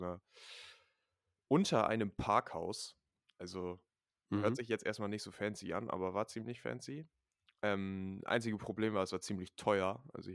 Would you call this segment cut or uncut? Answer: uncut